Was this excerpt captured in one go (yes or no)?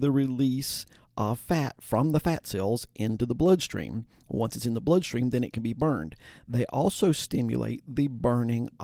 yes